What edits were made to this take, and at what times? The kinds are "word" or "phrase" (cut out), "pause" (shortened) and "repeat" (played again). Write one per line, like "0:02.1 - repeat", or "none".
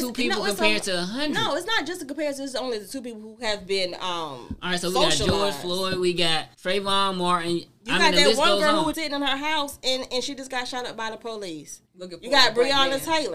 0:06.5 - pause
0:08.9 - word
0:11.8 - pause

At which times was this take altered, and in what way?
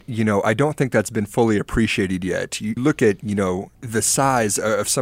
0:02.8 - word
0:03.7 - pause

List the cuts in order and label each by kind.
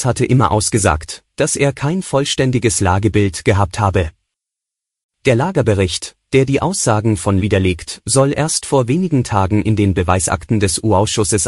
0:07.4 - word

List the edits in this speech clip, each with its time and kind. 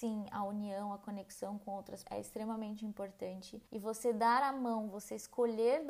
0:02.0 - word
0:03.7 - pause

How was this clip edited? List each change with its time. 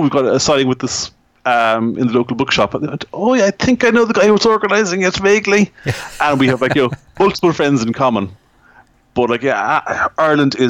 none

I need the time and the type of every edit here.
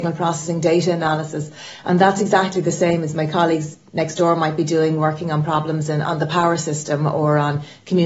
none

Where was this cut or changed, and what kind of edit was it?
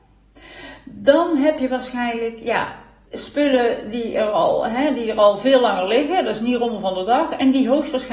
0:03.1 - word

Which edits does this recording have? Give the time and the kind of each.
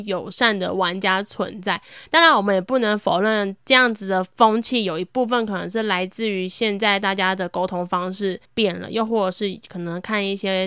0:08.4 - pause

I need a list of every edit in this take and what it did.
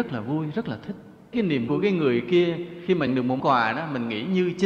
0:01.3 - word
0:01.7 - word
0:03.1 - word
0:03.4 - word

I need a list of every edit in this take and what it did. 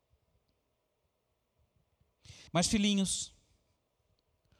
0:02.5 - pause

